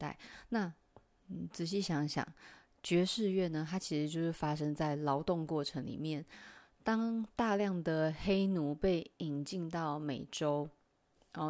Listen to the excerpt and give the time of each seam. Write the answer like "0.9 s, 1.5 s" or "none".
none